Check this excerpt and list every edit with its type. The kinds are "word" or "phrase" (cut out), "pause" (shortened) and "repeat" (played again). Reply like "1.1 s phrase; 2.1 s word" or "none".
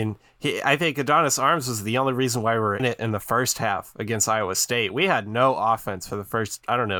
2.8 s word